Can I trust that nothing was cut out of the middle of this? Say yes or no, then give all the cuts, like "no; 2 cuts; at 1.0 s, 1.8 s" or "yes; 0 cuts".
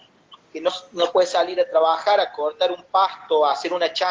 yes; 0 cuts